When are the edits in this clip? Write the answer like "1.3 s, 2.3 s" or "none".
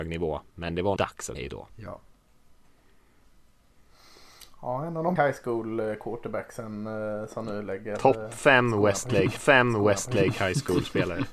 1.0 s, 1.3 s, 1.7 s, 5.2 s, 9.4 s